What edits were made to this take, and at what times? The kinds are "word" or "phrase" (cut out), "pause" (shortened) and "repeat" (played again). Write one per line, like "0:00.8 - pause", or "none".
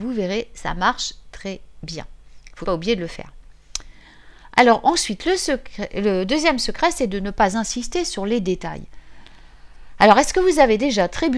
0:02.6 - word

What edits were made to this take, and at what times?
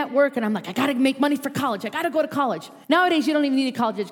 0:02.8 - pause

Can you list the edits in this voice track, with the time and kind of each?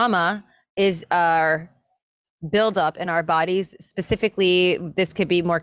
none

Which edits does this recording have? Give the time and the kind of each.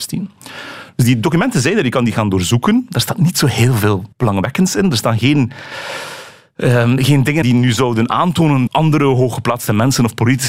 0:04.1 - pause
0:07.4 - word
0:08.7 - word

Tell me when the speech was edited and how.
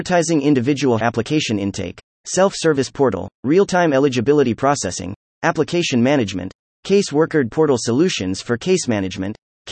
0:01.0 - word
0:03.4 - pause
0:07.5 - word

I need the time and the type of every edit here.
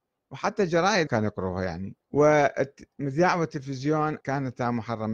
0:01.1 - word
0:02.0 - pause
0:04.2 - word

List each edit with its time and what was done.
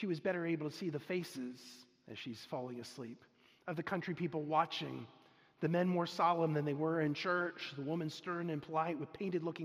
none

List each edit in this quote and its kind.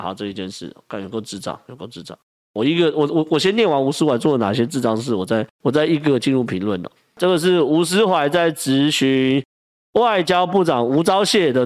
0:05.5 - pause

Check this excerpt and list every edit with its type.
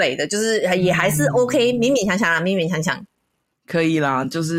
none

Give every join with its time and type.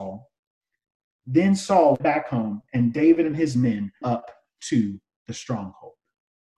0:02.0 - word
0:04.0 - word

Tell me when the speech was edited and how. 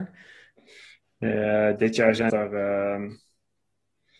0:02.3 - word

